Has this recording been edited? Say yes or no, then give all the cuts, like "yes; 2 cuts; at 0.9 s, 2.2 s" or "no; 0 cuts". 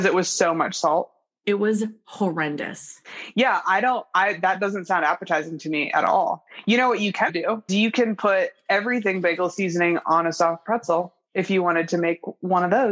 yes; 2 cuts; at 7.3 s, 7.7 s